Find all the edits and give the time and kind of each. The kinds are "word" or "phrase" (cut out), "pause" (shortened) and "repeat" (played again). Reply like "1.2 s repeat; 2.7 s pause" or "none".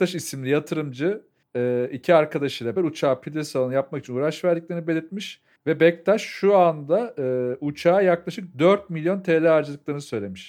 1.4 s pause; 2.8 s word; 5.6 s pause